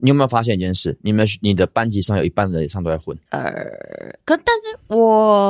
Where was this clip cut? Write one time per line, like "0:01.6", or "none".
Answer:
0:03.3